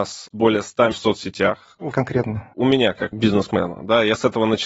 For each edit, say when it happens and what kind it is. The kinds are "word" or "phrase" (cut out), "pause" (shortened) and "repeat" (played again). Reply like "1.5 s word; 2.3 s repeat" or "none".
0.9 s phrase; 1.9 s word; 3.1 s word